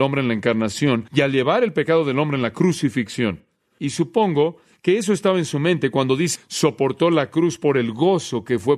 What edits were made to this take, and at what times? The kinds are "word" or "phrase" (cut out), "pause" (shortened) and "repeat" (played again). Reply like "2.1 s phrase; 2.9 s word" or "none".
1.1 s pause; 6.4 s phrase